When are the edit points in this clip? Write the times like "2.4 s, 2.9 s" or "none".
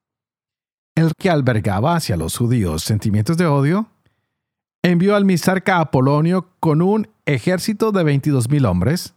1.1 s